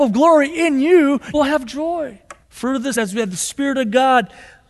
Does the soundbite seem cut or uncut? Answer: cut